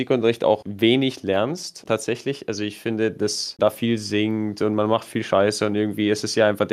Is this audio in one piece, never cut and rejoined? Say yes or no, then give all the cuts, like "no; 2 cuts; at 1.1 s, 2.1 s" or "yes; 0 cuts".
no; 2 cuts; at 1.9 s, 3.6 s